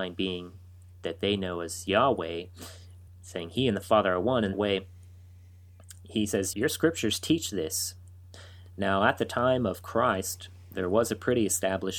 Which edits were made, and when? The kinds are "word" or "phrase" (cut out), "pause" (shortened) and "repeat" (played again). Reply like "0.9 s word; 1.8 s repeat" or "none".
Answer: 3.1 s word; 4.5 s word; 6.5 s word